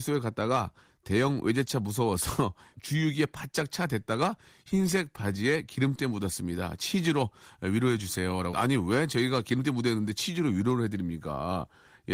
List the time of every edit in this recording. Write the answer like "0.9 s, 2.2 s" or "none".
2.7 s, 8.5 s